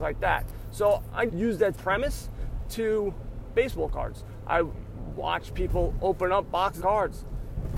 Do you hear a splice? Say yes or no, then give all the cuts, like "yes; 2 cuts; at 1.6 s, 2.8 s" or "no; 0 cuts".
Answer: yes; 4 cuts; at 1.3 s, 1.7 s, 3.5 s, 6.8 s